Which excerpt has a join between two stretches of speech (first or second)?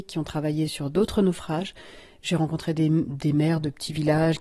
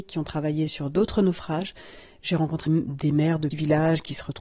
second